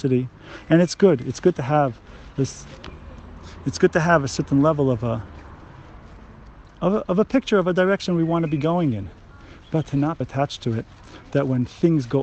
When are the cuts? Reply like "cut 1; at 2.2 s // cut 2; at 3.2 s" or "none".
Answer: cut 1; at 10.2 s